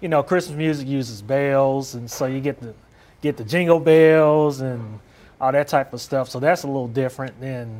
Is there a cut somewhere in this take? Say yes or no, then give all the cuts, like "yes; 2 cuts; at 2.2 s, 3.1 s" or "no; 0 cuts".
no; 0 cuts